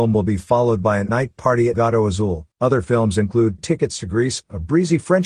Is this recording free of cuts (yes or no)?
no